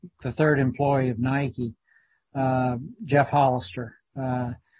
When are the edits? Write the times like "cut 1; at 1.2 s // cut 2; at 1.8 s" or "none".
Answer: none